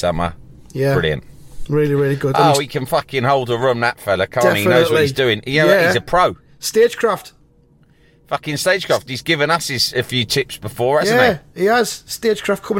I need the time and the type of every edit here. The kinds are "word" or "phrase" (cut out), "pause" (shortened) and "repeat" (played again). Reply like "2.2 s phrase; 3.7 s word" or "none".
none